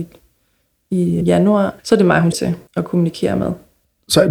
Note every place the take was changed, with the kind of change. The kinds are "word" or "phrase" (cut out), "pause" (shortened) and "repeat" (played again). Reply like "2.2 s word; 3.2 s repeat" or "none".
1.2 s word; 1.8 s pause; 2.3 s word; 2.7 s pause